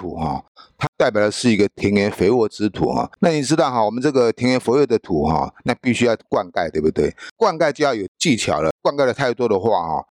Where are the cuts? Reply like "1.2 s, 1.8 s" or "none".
3.2 s